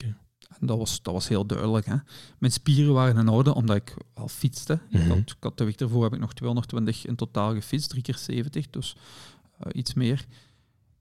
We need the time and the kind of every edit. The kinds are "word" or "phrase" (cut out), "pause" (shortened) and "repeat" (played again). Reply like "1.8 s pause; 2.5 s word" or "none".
none